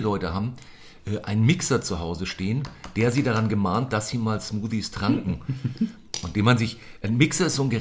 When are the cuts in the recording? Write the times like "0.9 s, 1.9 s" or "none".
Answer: none